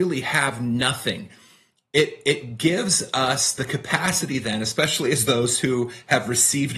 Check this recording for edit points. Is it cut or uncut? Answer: uncut